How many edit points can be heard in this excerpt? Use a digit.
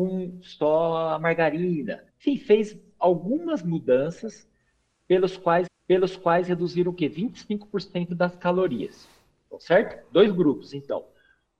2